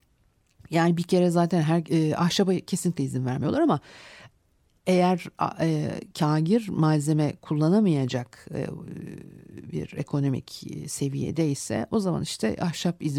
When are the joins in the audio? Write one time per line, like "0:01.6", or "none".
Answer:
0:01.9